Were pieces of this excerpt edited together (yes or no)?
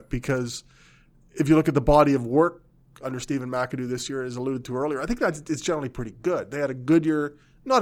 no